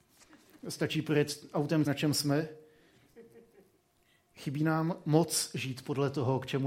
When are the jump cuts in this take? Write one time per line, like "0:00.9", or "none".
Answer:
0:01.9
0:03.8